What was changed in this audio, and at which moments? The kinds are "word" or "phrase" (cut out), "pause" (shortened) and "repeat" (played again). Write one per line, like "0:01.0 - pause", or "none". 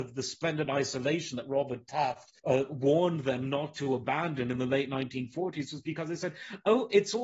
0:02.4 - pause